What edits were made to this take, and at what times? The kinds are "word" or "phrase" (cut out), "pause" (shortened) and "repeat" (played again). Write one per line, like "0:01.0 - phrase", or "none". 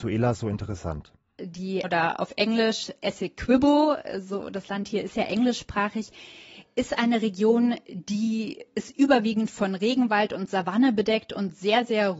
0:01.8 - word